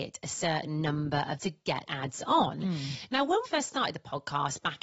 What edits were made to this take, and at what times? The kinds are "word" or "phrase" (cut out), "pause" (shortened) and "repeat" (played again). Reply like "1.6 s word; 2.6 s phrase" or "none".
1.4 s word; 1.9 s word; 3.5 s word